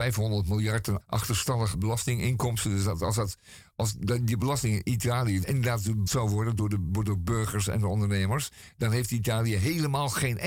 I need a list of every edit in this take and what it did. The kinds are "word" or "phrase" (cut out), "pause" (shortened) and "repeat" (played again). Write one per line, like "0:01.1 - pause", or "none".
0:01.0 - word
0:01.7 - word
0:05.4 - word
0:06.1 - word